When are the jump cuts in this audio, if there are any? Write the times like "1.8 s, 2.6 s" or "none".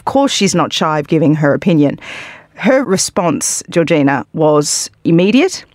2.8 s